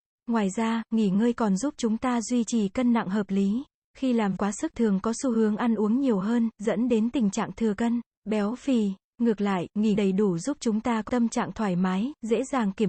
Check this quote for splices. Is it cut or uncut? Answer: cut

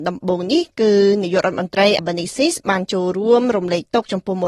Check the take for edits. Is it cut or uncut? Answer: cut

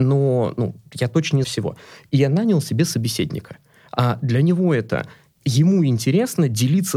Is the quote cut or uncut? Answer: cut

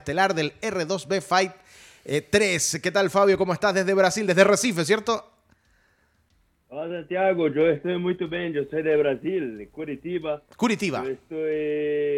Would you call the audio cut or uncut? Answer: uncut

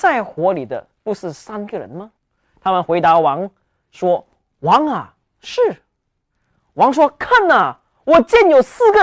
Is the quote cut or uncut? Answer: cut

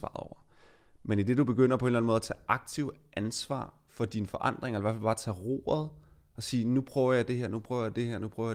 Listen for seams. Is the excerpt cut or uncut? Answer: uncut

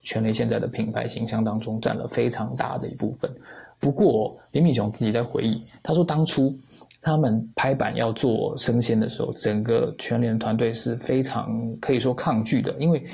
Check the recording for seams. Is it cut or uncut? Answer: cut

